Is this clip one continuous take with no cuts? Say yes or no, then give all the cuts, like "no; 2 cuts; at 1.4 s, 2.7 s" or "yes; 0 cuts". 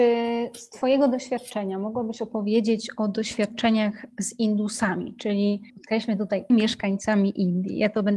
no; 2 cuts; at 5.7 s, 6.5 s